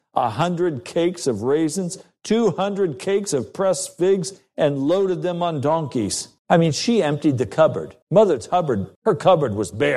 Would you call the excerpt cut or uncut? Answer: cut